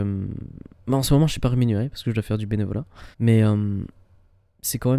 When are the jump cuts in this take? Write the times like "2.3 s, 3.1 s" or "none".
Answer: 3.1 s

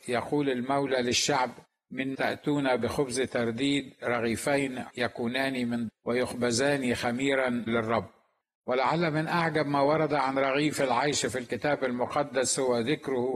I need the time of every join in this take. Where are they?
2.1 s, 4.9 s, 5.9 s, 7.7 s

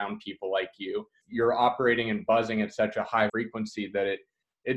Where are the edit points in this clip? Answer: 1.2 s, 3.3 s

